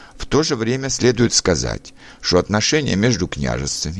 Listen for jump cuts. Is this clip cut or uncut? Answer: uncut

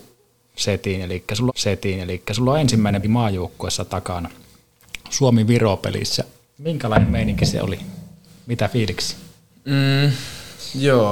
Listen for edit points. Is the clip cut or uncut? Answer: cut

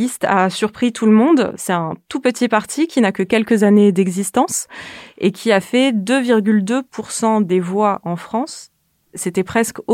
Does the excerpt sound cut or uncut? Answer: uncut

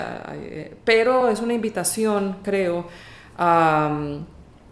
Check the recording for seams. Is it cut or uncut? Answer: uncut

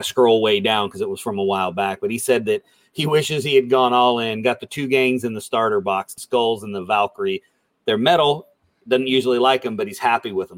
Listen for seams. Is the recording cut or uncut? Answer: cut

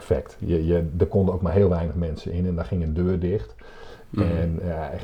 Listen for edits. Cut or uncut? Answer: uncut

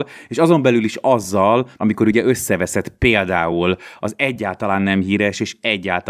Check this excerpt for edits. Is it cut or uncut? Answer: uncut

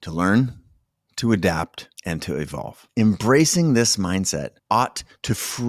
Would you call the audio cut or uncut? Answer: cut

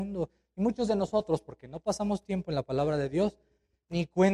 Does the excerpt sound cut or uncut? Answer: uncut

